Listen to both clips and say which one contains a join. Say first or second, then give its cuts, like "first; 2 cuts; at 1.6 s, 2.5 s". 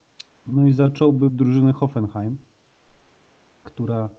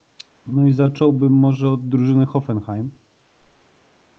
first; 1 cut; at 1.3 s